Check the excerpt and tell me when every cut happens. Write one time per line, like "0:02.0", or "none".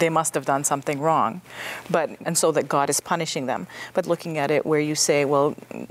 0:02.2
0:04.0